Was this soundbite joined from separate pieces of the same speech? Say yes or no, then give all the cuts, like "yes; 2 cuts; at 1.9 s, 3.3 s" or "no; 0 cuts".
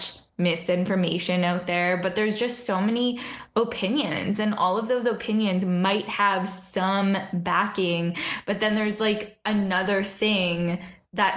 no; 0 cuts